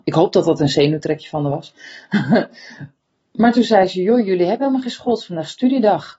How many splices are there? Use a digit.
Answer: 0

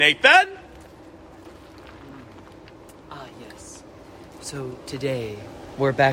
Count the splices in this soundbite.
0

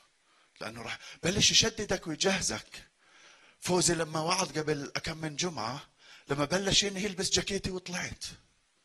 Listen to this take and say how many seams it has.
0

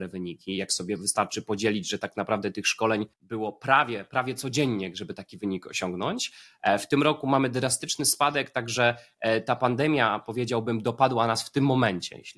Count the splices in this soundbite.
1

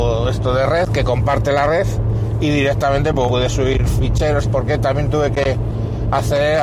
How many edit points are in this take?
2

